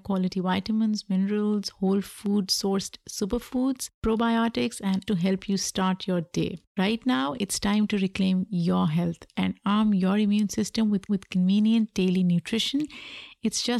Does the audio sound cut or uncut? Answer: cut